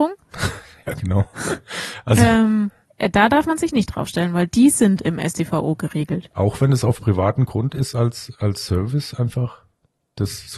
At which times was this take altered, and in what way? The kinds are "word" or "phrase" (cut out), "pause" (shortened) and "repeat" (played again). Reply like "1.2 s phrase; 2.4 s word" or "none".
2.9 s pause